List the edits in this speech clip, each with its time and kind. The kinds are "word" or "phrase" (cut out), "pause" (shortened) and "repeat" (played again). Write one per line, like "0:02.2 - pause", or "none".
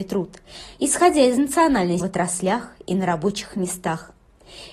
0:02.0 - phrase